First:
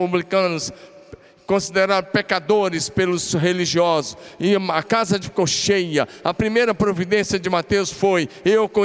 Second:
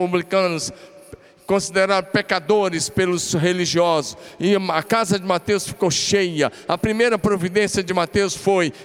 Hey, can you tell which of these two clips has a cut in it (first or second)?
first